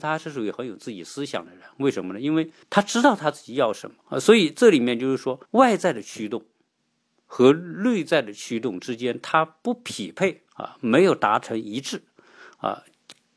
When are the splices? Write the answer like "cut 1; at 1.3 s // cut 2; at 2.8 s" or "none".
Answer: cut 1; at 2.6 s // cut 2; at 4.0 s // cut 3; at 5.5 s // cut 4; at 10.5 s